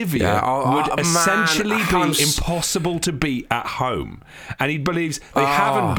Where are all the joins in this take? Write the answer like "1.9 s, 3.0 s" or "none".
none